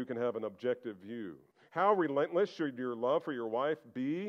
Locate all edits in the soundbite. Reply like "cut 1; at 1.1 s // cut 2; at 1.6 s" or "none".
cut 1; at 1.5 s